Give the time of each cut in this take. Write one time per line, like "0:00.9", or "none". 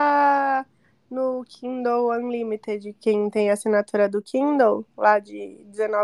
none